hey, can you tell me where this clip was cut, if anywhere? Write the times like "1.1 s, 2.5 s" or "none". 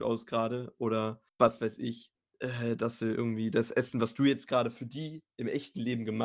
1.3 s